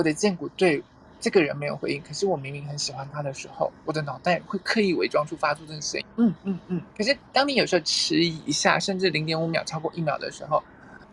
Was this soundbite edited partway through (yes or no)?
yes